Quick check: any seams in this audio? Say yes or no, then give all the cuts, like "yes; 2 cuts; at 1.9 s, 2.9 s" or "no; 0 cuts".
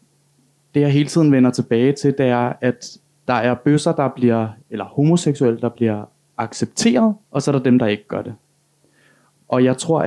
yes; 2 cuts; at 4.6 s, 7.2 s